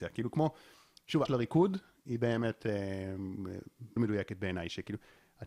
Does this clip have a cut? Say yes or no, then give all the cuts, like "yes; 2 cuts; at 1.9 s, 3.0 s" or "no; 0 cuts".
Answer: yes; 2 cuts; at 1.2 s, 4.0 s